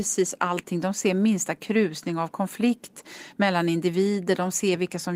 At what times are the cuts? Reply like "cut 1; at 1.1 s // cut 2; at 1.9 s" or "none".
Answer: none